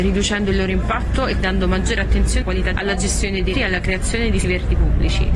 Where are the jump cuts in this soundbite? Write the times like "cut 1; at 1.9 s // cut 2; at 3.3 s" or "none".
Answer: cut 1; at 1.4 s // cut 2; at 2.4 s // cut 3; at 2.7 s // cut 4; at 3.5 s // cut 5; at 4.4 s